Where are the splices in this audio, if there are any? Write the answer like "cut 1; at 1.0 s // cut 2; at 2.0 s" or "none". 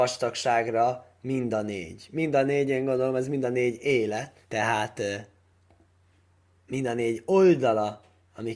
cut 1; at 4.4 s